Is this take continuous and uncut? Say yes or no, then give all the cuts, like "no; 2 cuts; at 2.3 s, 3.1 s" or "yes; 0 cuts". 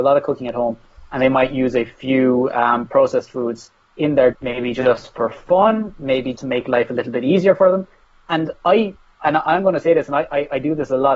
no; 2 cuts; at 4.3 s, 6.4 s